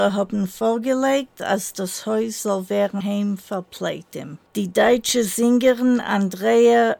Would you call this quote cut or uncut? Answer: cut